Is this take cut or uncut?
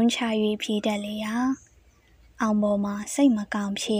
uncut